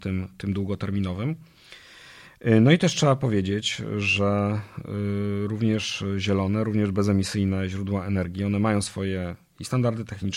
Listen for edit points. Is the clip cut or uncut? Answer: uncut